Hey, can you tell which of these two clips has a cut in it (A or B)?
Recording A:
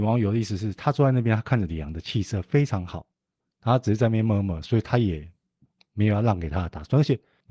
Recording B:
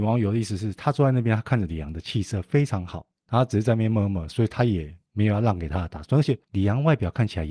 B